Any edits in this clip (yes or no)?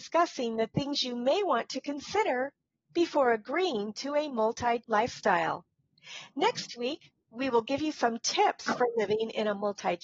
yes